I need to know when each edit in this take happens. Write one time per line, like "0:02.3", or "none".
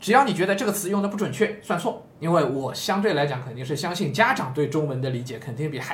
0:02.1